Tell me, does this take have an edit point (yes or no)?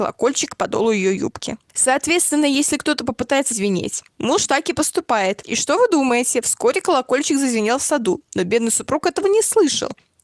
yes